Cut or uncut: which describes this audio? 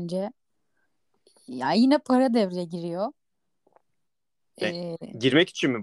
uncut